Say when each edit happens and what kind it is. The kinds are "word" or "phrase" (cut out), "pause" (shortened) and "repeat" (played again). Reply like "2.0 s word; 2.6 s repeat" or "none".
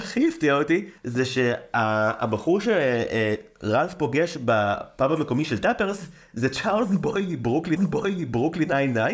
1.0 s pause; 7.8 s repeat